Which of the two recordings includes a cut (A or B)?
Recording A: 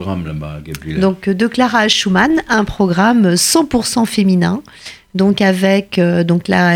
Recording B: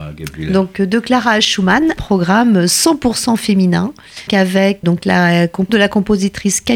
B